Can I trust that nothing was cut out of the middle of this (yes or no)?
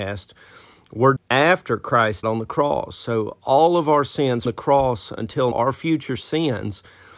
no